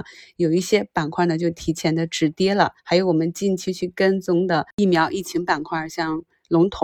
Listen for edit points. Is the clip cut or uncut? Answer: cut